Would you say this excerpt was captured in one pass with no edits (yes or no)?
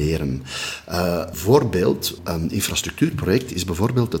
no